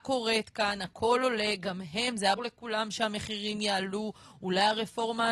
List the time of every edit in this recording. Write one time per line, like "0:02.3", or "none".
0:02.4